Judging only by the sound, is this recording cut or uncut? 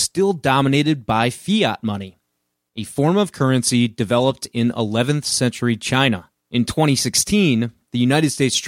cut